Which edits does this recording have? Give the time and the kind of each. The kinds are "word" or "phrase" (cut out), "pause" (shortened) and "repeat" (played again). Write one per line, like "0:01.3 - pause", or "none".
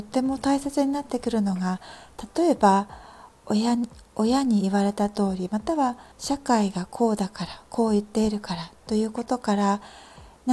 0:06.1 - pause